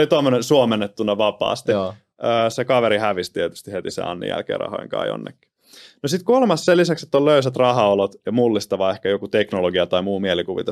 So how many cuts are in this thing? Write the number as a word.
zero